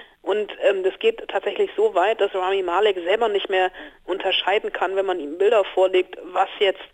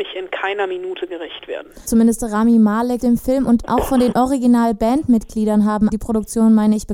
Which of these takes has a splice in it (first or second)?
second